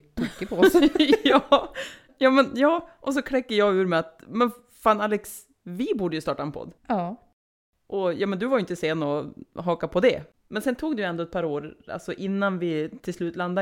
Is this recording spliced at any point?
yes; 1 cut; at 6.8 s

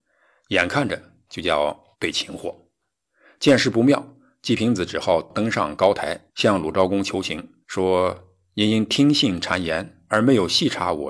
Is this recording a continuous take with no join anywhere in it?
no; 2 cuts; at 1.9 s, 7.6 s

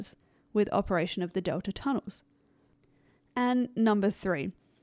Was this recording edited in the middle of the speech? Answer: no; 0 cuts

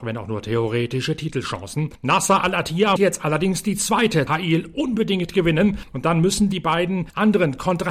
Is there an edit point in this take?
yes; 2 cuts; at 3.0 s, 4.3 s

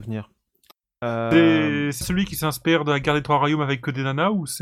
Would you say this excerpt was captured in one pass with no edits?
no; 1 cut; at 2.0 s

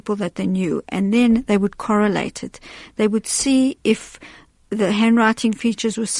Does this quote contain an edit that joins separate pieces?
no; 0 cuts

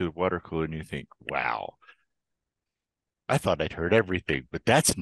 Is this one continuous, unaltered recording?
yes; 0 cuts

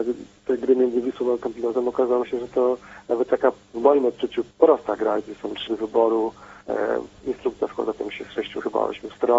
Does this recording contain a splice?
yes; 3 cuts; at 4.5 s, 5.7 s, 6.6 s

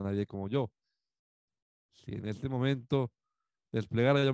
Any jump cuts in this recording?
no; 0 cuts

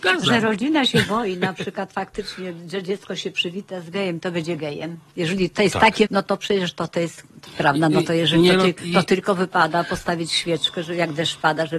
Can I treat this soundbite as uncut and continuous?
no; 3 cuts; at 5.1 s, 6.0 s, 7.4 s

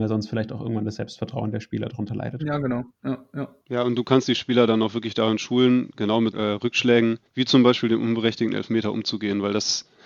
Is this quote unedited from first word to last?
no; 3 cuts; at 3.6 s, 6.3 s, 7.3 s

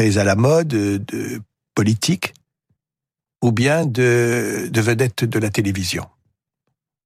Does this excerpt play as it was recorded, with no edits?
yes; 0 cuts

